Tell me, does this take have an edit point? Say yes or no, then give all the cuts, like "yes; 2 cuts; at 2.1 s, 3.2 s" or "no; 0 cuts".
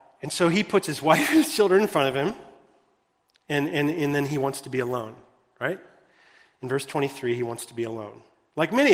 no; 0 cuts